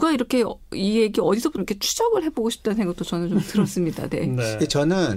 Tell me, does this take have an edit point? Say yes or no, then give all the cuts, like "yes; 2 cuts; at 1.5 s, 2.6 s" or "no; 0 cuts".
yes; 1 cut; at 1.6 s